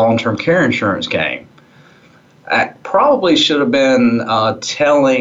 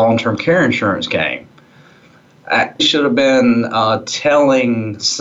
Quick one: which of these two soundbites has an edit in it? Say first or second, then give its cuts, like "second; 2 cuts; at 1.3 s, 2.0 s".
second; 1 cut; at 2.8 s